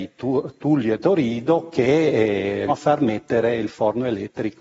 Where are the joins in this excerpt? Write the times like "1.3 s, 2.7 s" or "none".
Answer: 2.7 s